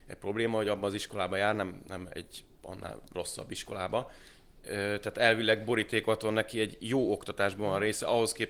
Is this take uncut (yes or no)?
yes